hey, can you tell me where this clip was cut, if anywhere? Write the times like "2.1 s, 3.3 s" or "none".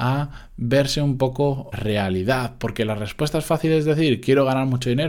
1.7 s